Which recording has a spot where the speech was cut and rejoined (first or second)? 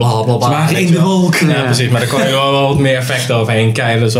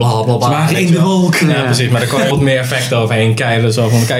second